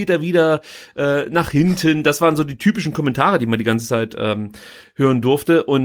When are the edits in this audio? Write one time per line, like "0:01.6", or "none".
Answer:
none